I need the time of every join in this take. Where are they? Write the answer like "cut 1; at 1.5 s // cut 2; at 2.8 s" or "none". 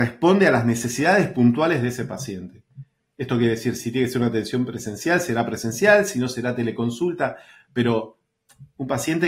cut 1; at 3.8 s